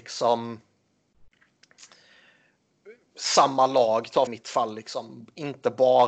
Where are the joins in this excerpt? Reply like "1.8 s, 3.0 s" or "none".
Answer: 4.3 s